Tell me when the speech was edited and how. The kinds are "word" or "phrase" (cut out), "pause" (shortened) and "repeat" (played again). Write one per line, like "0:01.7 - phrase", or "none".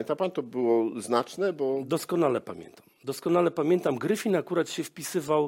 none